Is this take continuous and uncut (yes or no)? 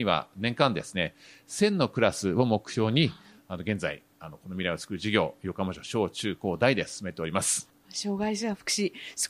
yes